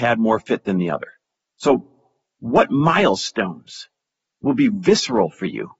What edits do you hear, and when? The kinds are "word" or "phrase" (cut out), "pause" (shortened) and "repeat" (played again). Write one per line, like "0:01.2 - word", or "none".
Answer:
none